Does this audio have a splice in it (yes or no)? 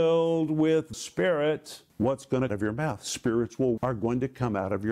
yes